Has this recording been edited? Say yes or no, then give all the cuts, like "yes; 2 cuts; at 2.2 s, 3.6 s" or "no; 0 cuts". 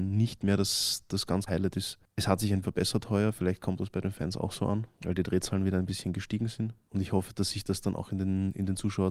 yes; 2 cuts; at 1.5 s, 2.6 s